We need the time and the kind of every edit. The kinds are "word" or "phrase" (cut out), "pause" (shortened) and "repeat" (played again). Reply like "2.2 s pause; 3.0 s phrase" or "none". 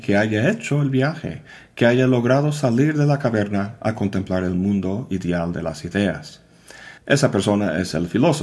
7.0 s pause